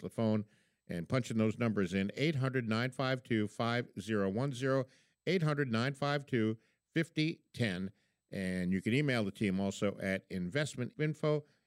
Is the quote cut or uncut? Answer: uncut